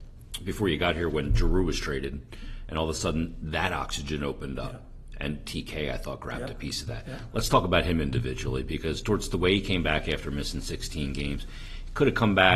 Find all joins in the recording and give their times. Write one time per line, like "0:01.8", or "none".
none